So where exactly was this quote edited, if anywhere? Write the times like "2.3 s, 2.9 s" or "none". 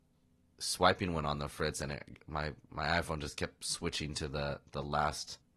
none